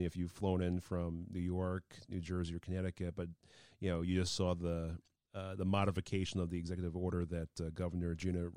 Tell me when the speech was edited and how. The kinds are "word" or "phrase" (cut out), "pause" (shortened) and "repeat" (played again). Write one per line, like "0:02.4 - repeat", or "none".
none